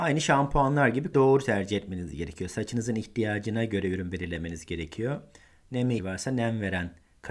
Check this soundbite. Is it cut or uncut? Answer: cut